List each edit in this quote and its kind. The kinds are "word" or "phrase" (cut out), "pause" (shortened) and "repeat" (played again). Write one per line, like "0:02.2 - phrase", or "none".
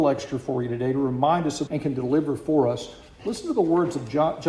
0:01.7 - phrase